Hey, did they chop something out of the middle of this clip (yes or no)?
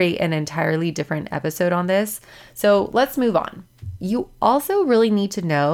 no